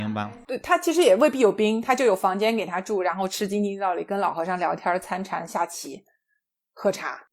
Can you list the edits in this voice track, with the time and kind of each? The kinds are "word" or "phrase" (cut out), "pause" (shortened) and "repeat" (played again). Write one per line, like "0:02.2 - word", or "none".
none